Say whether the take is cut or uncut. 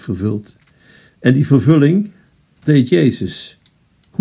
cut